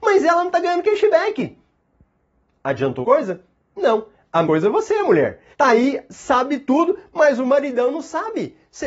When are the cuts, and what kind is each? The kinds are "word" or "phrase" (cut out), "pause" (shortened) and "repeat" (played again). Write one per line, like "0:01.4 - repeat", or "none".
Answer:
0:03.0 - word
0:04.4 - word
0:05.5 - pause

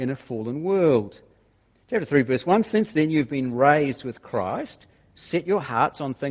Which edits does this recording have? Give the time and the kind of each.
none

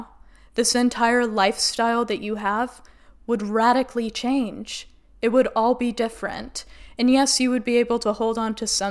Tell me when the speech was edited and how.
none

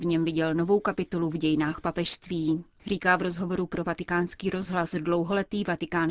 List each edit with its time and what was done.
none

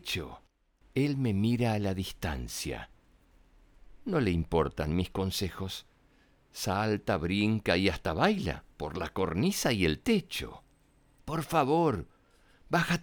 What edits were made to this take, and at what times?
0:08.7 - pause

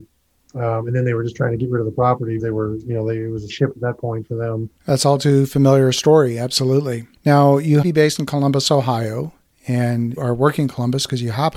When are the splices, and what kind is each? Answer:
0:02.4 - word
0:03.5 - word
0:04.8 - pause
0:07.1 - pause
0:07.8 - phrase
0:10.2 - word

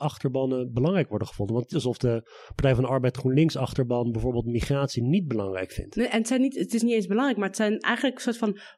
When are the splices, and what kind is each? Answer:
0:01.7 - phrase

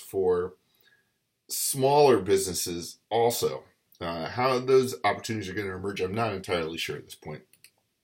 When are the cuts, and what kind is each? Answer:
0:03.0 - pause

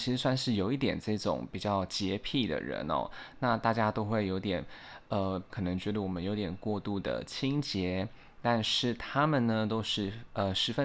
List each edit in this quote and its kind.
0:05.5 - phrase

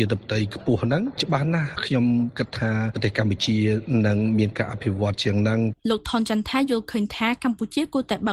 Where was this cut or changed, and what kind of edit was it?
0:05.8 - pause

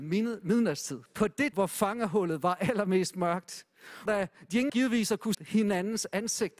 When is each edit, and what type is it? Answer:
0:01.1 - pause
0:01.5 - word
0:04.1 - word
0:04.7 - word
0:05.3 - word

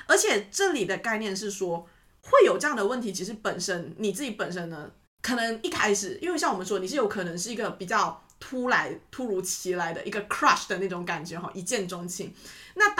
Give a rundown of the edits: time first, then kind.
none

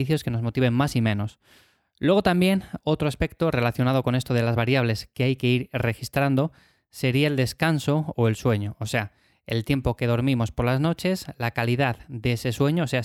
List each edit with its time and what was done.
none

